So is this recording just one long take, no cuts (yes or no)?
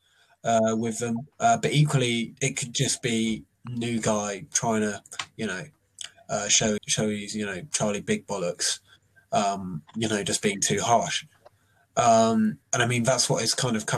no